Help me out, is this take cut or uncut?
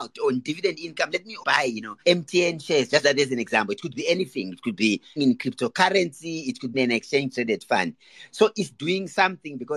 cut